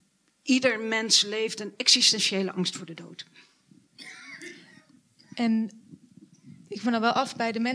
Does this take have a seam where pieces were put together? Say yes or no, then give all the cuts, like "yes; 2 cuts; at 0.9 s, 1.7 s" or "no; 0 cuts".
yes; 2 cuts; at 1.6 s, 6.8 s